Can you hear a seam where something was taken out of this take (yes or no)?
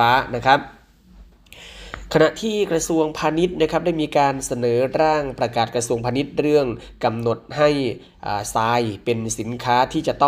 no